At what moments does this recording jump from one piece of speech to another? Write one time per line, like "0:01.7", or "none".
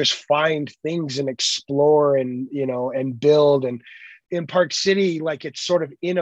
0:04.2